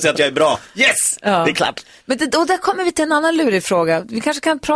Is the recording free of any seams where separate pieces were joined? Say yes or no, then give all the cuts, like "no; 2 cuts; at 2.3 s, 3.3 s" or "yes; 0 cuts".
yes; 0 cuts